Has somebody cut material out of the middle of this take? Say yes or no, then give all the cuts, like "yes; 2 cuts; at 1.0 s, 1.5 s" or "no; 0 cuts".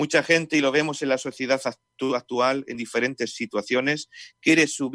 no; 0 cuts